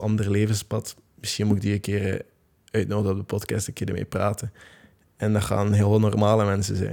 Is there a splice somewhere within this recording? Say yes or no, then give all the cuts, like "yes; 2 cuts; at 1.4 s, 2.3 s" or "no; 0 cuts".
no; 0 cuts